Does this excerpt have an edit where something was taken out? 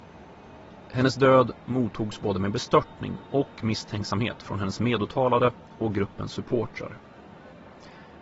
no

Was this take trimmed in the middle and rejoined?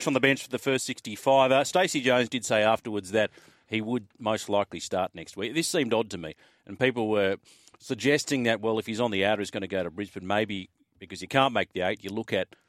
no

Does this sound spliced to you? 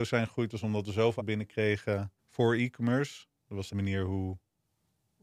yes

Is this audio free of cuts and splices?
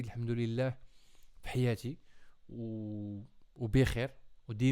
yes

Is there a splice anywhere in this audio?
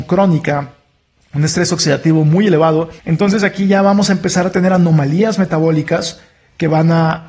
yes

